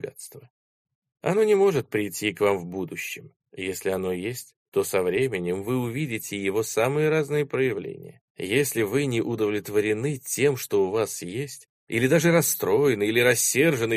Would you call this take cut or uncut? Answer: cut